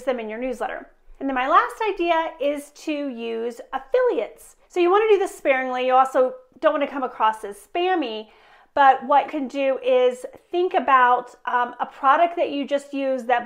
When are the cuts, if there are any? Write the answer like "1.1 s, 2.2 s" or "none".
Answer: 1.2 s, 4.6 s, 9.3 s